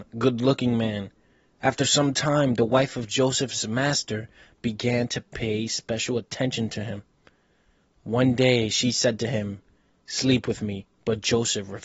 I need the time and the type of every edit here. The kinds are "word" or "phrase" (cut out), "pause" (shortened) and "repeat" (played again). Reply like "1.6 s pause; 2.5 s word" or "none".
none